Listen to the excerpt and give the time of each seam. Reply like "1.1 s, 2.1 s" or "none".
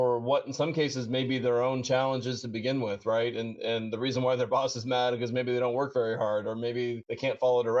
none